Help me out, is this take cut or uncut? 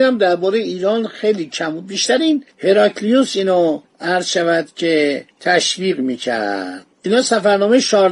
cut